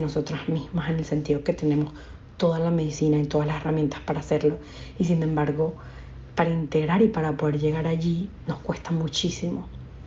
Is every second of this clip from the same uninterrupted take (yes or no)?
yes